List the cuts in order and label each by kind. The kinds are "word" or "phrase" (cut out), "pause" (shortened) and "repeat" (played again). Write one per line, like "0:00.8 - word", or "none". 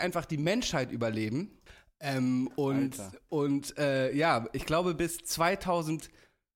none